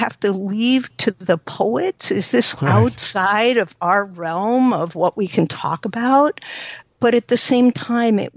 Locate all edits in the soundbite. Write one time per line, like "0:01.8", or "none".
0:02.6